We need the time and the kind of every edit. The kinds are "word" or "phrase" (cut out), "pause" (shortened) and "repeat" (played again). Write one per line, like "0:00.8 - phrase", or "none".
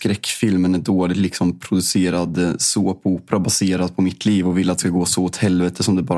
none